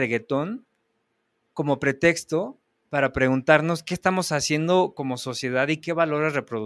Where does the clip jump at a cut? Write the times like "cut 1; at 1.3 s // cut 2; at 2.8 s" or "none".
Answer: none